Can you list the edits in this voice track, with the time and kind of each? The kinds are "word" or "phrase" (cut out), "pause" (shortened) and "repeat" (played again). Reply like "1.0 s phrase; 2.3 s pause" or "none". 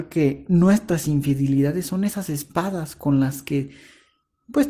none

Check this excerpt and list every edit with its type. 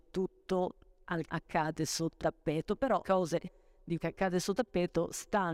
1.3 s word; 2.2 s word; 3.0 s word; 4.0 s word; 4.6 s word

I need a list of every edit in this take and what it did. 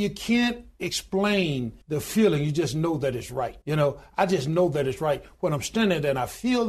1.8 s pause; 3.6 s pause

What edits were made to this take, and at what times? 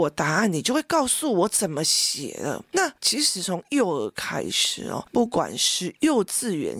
3.0 s pause

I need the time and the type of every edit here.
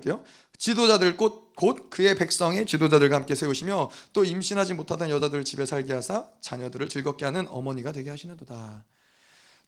none

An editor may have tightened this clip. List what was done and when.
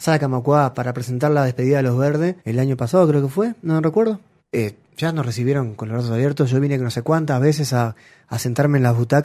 2.4 s pause; 4.4 s pause

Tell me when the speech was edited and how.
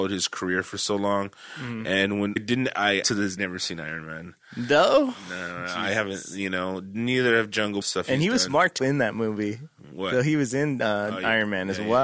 2.4 s word; 3.0 s word; 3.4 s word; 7.8 s phrase; 8.8 s phrase

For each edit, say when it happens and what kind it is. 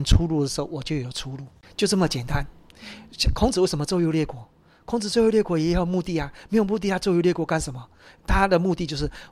none

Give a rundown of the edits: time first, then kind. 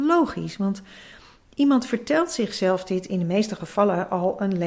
none

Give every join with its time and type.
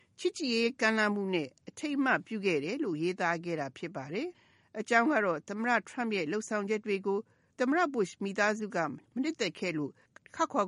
4.3 s pause

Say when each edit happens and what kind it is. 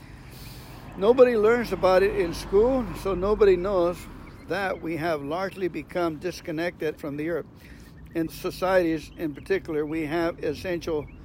7.0 s phrase; 8.3 s word

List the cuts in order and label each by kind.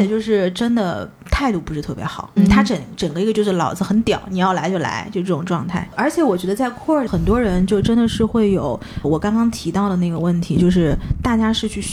1.2 s pause; 2.4 s word; 7.1 s phrase; 9.0 s word

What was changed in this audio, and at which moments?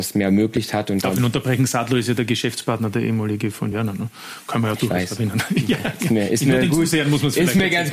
3.7 s word

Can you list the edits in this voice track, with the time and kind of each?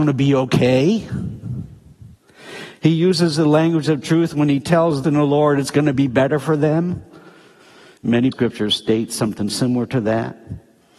5.0 s phrase; 8.3 s phrase

